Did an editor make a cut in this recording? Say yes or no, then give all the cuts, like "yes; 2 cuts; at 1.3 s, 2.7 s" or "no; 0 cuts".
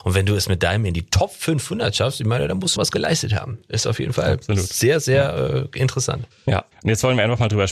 yes; 1 cut; at 2.8 s